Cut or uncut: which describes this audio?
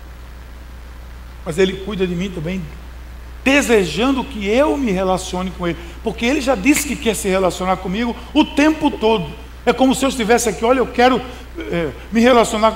uncut